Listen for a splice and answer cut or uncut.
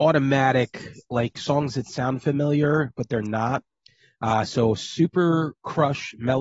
uncut